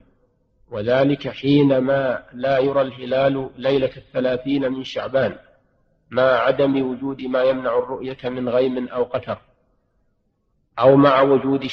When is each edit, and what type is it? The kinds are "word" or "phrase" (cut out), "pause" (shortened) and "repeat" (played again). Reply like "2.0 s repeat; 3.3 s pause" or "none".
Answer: none